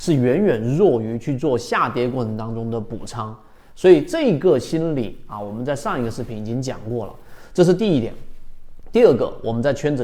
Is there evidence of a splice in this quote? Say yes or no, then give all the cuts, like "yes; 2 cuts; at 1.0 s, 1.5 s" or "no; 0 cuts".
no; 0 cuts